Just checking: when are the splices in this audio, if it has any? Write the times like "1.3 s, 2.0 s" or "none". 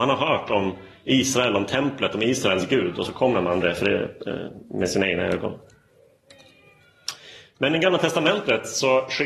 3.6 s